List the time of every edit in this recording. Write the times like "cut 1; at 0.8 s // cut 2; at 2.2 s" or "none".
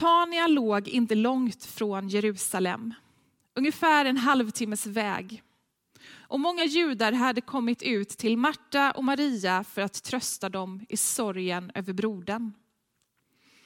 none